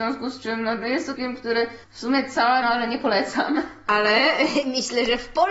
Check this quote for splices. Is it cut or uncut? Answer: cut